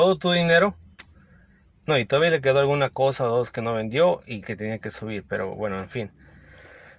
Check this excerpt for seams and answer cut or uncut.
uncut